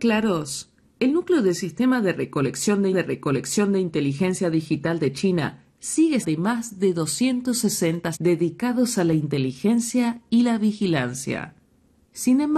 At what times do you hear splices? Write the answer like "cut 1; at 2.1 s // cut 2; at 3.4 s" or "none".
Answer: cut 1; at 2.9 s // cut 2; at 6.2 s // cut 3; at 8.1 s

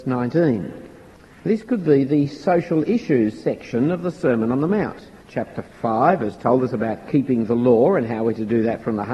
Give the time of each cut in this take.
cut 1; at 5.2 s

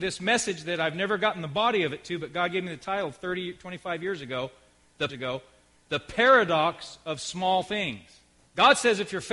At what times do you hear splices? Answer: cut 1; at 5.1 s // cut 2; at 8.4 s

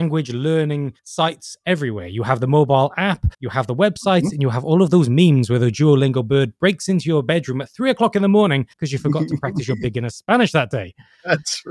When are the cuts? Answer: cut 1; at 1.0 s // cut 2; at 3.3 s // cut 3; at 8.7 s

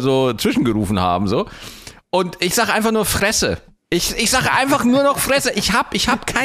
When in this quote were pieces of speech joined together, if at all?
none

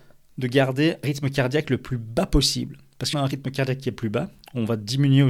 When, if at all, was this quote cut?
cut 1; at 1.0 s // cut 2; at 3.1 s

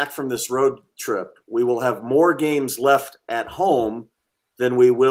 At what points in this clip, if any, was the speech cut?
none

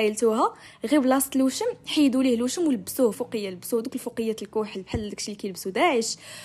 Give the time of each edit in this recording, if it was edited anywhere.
cut 1; at 3.1 s

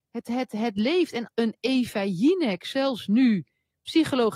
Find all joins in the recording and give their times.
cut 1; at 1.3 s

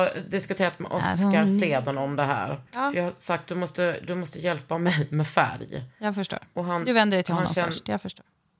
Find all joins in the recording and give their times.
cut 1; at 2.7 s

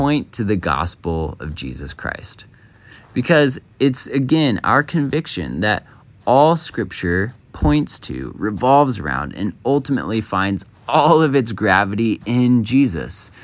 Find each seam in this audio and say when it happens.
none

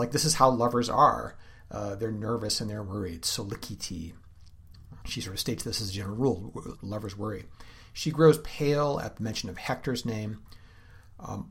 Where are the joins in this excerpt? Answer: cut 1; at 5.0 s // cut 2; at 6.7 s

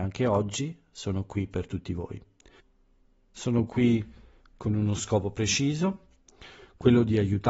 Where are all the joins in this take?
none

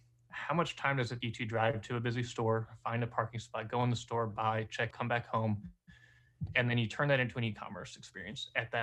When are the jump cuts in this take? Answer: cut 1; at 1.2 s // cut 2; at 4.9 s

